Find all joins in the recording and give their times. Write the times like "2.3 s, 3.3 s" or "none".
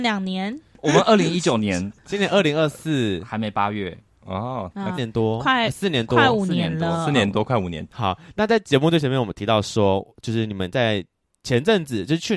5.0 s